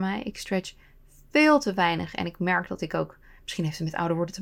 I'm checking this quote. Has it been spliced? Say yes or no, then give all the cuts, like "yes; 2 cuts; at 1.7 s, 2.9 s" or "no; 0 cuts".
no; 0 cuts